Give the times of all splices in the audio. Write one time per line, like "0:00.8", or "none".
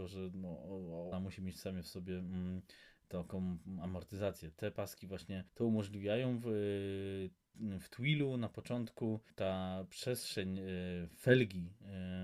0:01.1
0:05.5
0:09.3

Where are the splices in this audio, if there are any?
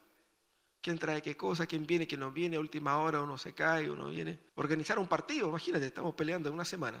0:04.5

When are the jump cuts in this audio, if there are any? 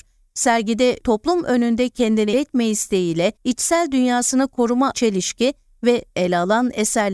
0:01.0
0:02.3
0:03.4
0:04.9
0:06.1

